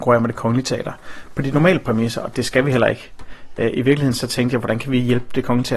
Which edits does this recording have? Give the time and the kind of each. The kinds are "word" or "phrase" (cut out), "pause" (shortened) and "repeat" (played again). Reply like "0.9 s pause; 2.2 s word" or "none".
none